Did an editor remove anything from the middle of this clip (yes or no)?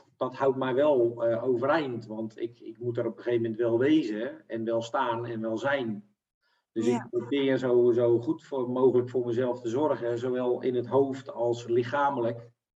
no